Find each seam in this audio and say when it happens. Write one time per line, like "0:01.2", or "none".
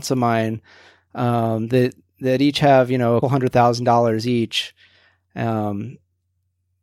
0:03.2